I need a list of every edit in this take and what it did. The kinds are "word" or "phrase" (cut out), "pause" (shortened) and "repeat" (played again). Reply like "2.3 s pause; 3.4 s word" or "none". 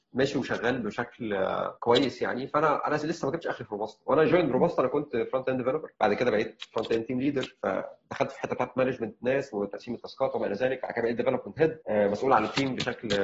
1.8 s pause; 6.0 s pause; 11.8 s pause